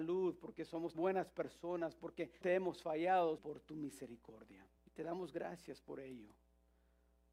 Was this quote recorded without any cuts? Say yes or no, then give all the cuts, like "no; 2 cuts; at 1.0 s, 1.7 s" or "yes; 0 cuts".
no; 4 cuts; at 0.9 s, 2.4 s, 3.4 s, 4.8 s